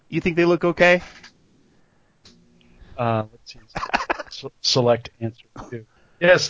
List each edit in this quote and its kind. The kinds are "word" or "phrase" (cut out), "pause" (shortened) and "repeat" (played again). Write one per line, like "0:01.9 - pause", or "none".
0:03.7 - pause